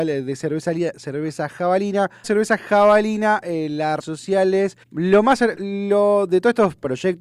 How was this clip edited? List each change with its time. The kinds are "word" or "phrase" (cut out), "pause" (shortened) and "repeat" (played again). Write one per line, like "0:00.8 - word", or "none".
0:02.2 - word
0:04.0 - word
0:04.8 - pause
0:05.5 - word